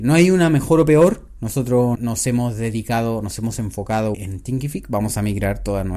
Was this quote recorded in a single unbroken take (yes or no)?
no